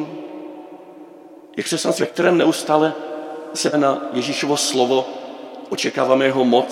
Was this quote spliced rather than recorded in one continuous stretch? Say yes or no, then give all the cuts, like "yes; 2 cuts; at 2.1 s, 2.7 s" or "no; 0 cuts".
yes; 3 cuts; at 1.5 s, 2.0 s, 3.7 s